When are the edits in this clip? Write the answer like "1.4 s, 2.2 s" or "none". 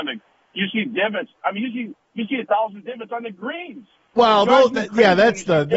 none